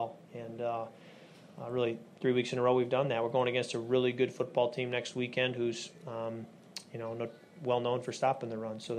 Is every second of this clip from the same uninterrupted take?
yes; 0 cuts

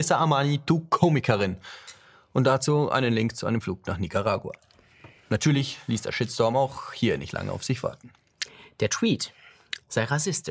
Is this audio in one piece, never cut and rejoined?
yes; 0 cuts

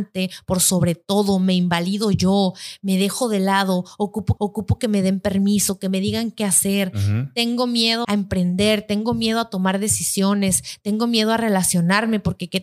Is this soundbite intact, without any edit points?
no; 2 cuts; at 4.4 s, 8.0 s

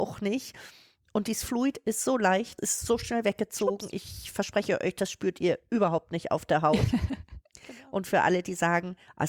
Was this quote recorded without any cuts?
no; 1 cut; at 2.6 s

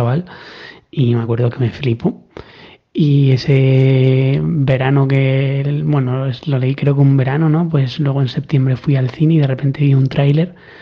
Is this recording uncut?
yes; 0 cuts

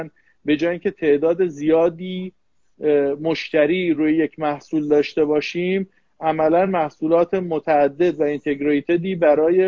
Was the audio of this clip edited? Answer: no; 0 cuts

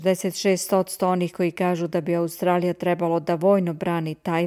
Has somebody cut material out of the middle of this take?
no; 0 cuts

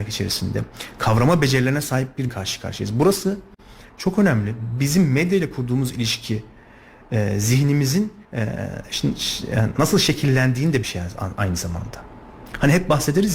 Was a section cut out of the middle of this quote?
yes; 3 cuts; at 2.3 s, 8.2 s, 10.8 s

